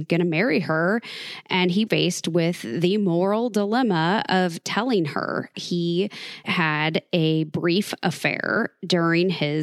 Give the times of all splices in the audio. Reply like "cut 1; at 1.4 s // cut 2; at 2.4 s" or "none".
cut 1; at 1.9 s // cut 2; at 5.5 s // cut 3; at 6.4 s

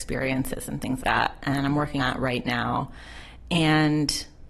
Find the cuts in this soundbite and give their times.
cut 1; at 1.0 s // cut 2; at 2.0 s

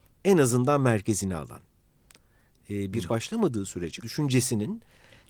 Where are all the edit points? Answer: cut 1; at 3.1 s // cut 2; at 4.0 s

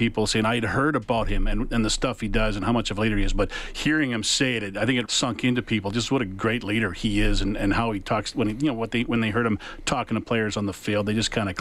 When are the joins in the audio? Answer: cut 1; at 5.1 s

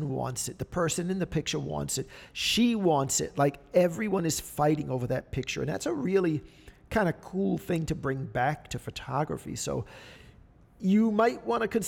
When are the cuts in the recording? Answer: none

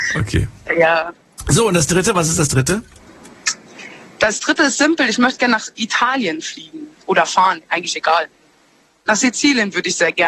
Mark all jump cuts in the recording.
none

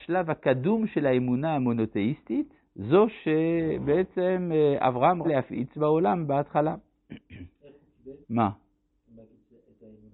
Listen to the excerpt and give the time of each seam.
cut 1; at 2.7 s // cut 2; at 5.2 s // cut 3; at 8.2 s

